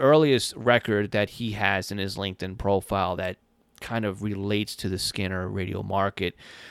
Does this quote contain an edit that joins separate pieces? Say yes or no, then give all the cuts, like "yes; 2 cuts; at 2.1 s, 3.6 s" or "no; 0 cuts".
no; 0 cuts